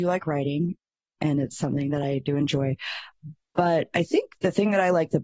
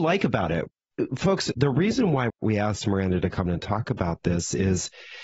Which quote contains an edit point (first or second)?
second